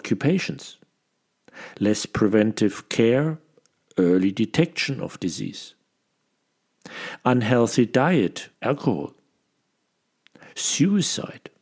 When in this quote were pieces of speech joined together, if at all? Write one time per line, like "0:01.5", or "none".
0:08.5